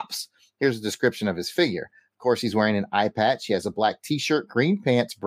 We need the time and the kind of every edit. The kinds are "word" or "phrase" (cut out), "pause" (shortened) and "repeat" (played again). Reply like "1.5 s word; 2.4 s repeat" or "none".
none